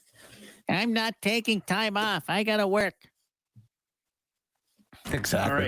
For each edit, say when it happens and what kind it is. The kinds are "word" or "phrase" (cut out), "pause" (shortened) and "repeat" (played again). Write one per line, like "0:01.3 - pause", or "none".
none